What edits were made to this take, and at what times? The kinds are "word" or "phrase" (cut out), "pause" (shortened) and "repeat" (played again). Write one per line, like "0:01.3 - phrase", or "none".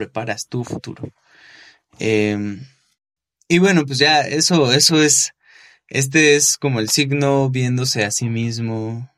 none